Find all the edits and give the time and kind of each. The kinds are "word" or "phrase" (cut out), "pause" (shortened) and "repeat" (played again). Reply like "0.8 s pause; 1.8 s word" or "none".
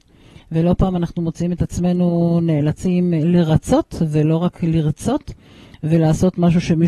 none